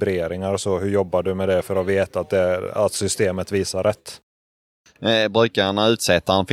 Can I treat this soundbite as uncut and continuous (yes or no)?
yes